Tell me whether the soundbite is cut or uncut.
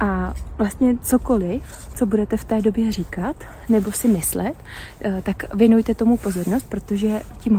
uncut